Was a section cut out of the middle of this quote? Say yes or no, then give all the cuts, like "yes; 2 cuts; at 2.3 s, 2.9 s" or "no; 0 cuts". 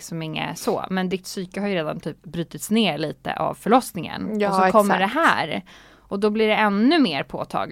no; 0 cuts